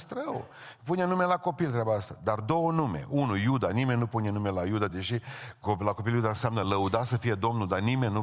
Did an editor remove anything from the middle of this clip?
no; 0 cuts

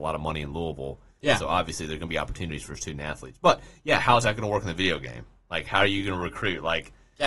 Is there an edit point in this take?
no; 0 cuts

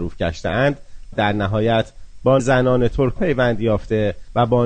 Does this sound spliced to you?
yes; 3 cuts; at 1.1 s, 2.4 s, 3.2 s

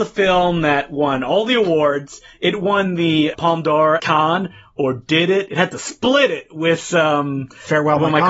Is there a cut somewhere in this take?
yes; 2 cuts; at 3.3 s, 4.0 s

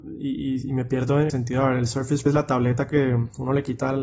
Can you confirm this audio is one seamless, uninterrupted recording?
no; 2 cuts; at 1.3 s, 2.3 s

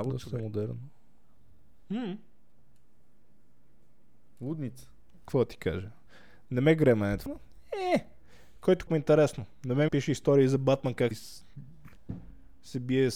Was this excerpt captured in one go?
no; 4 cuts; at 7.3 s, 8.9 s, 9.9 s, 11.1 s

